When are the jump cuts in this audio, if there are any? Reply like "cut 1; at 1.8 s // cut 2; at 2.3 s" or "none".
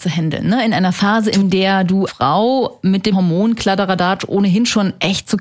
cut 1; at 2.1 s // cut 2; at 3.1 s